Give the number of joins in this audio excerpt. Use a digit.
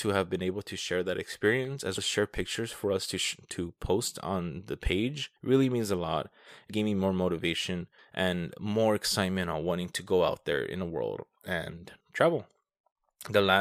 5